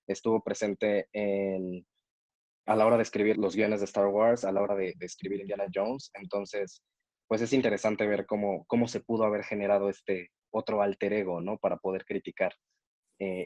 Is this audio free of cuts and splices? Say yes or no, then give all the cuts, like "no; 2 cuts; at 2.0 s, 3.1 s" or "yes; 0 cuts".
no; 2 cuts; at 2.7 s, 3.3 s